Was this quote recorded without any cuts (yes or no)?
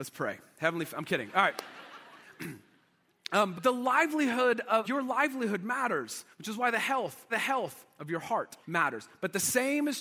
no